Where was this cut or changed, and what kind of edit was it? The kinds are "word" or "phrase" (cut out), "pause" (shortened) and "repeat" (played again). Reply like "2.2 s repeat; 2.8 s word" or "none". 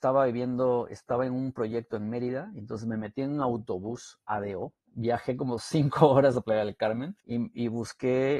4.8 s pause; 7.2 s pause